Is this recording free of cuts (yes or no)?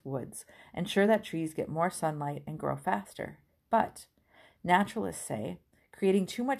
yes